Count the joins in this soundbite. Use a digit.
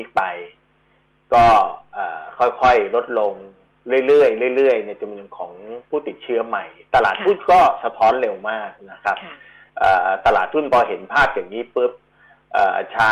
0